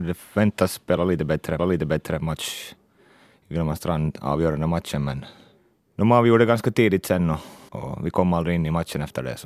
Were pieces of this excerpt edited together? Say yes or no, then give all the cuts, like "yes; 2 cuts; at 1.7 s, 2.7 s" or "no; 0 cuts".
yes; 3 cuts; at 1.6 s, 5.6 s, 7.7 s